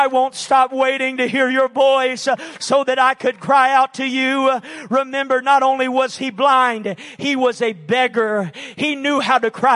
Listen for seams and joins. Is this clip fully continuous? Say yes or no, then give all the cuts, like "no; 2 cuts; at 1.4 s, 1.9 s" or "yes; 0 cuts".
yes; 0 cuts